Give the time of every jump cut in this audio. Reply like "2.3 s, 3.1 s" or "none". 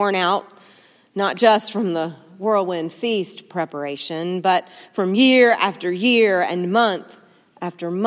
none